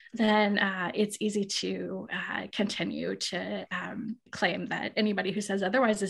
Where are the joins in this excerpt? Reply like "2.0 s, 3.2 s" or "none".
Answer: 4.3 s